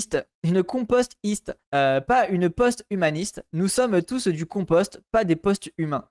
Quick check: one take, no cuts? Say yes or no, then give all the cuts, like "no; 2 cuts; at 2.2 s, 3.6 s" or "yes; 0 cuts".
no; 1 cut; at 1.6 s